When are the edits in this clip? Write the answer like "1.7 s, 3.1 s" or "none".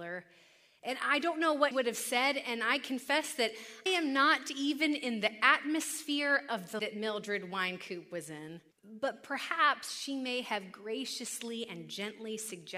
1.7 s, 3.9 s, 6.8 s, 8.7 s

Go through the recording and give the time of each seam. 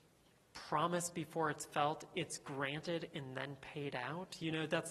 none

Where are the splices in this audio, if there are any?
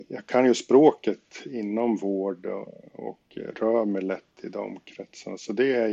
3.3 s, 4.3 s

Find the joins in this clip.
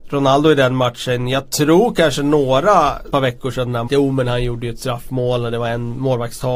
3.1 s, 3.9 s

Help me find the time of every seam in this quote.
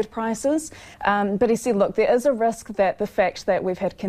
0.9 s

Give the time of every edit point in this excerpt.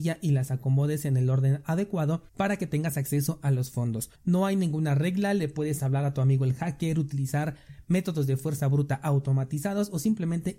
2.3 s, 4.1 s

